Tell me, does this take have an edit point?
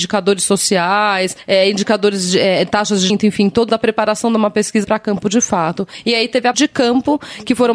yes; 4 cuts; at 3.1 s, 3.7 s, 4.8 s, 6.5 s

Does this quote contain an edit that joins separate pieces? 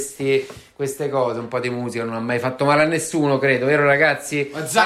no; 0 cuts

